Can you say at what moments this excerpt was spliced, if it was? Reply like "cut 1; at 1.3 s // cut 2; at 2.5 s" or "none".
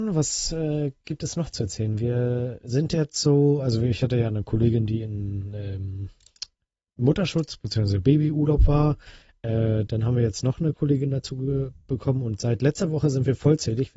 none